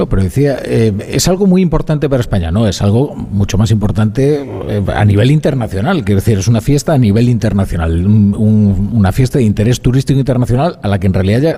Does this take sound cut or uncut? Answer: uncut